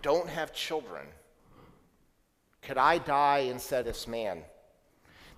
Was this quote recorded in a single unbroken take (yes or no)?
no